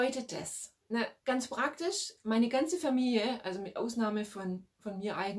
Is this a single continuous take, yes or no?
no